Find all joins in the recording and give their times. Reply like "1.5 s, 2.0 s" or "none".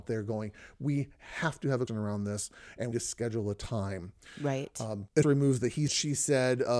1.9 s, 2.9 s, 5.2 s, 5.9 s